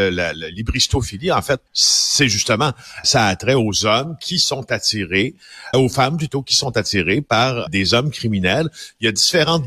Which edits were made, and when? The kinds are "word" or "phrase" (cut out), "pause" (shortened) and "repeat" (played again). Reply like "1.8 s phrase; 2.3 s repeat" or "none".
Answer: 1.7 s pause; 3.0 s word; 5.7 s word; 7.7 s word

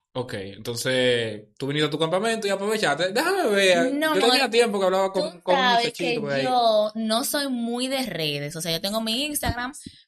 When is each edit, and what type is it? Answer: 4.2 s word

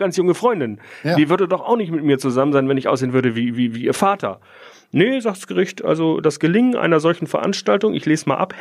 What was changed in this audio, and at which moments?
none

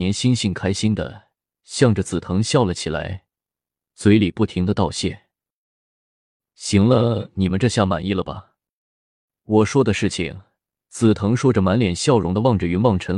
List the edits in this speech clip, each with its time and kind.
none

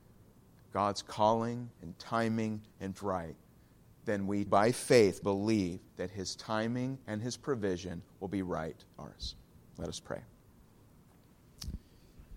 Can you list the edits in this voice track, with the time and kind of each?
1.7 s pause; 3.0 s phrase; 4.5 s word; 5.2 s word; 5.9 s pause; 7.0 s pause; 9.0 s word

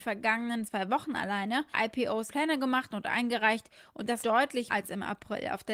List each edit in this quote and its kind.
1.7 s word; 2.3 s word; 4.2 s word; 4.7 s word

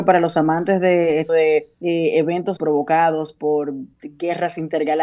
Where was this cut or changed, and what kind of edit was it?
1.3 s word; 1.7 s pause; 2.6 s word; 3.9 s pause

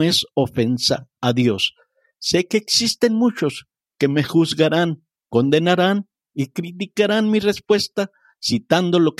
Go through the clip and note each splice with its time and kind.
none

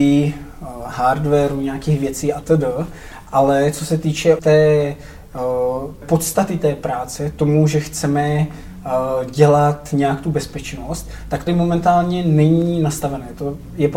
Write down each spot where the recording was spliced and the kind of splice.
4.4 s word; 6.0 s word; 11.5 s word

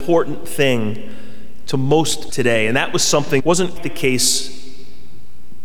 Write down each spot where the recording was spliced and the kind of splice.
2.3 s word; 3.4 s word; 3.8 s word

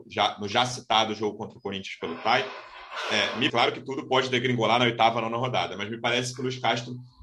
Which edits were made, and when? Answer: 3.5 s word

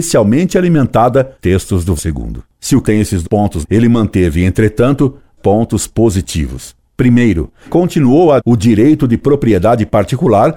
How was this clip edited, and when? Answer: 1.4 s word; 2.0 s word; 2.8 s word; 3.2 s word; 3.6 s word; 5.4 s word; 7.7 s word; 8.4 s word

